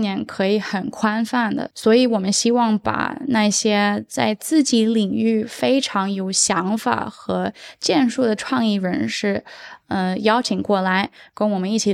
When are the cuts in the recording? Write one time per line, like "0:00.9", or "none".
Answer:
none